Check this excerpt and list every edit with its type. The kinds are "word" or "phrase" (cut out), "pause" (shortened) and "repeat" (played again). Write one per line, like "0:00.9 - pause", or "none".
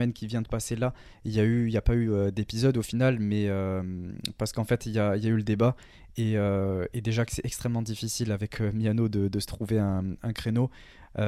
none